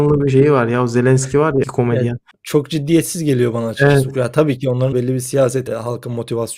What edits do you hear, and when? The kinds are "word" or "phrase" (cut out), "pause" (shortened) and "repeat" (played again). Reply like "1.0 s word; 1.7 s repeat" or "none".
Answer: 1.6 s word; 2.3 s pause; 4.9 s word; 5.7 s word